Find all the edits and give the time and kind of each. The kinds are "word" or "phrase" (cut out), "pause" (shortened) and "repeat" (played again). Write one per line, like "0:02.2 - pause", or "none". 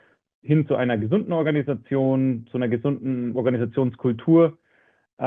none